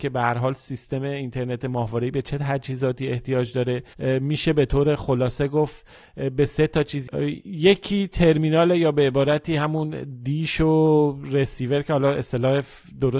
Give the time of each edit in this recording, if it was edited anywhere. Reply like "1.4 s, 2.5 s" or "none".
none